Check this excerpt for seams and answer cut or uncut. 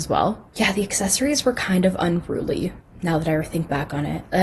uncut